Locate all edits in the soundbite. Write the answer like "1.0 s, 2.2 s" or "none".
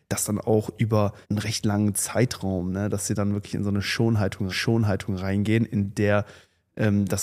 1.2 s, 4.5 s

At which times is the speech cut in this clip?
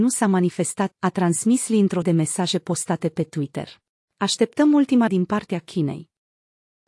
0.9 s, 2.0 s, 4.0 s, 5.1 s

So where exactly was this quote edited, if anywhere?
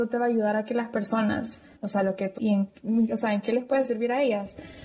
1.8 s, 2.4 s

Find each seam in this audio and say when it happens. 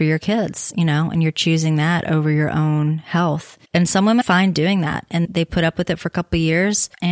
3.6 s, 4.2 s, 5.2 s

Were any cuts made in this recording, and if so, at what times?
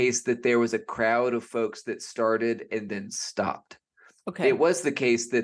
none

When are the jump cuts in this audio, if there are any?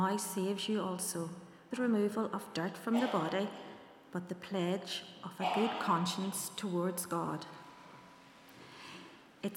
1.7 s

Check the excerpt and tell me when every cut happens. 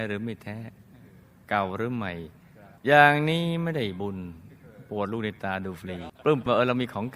2.8 s, 6.1 s

